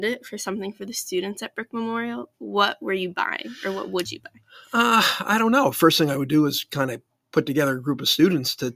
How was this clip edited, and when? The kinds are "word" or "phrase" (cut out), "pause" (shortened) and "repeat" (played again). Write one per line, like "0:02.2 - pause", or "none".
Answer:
none